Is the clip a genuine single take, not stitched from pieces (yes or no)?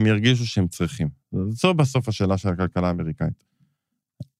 yes